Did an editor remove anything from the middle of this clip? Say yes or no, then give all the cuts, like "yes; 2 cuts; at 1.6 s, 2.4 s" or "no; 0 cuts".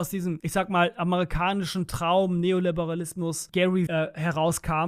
yes; 1 cut; at 3.9 s